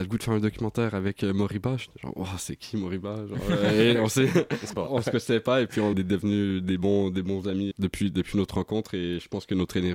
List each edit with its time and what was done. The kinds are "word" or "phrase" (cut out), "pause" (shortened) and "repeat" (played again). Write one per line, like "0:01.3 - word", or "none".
0:04.7 - word
0:05.9 - phrase
0:07.7 - word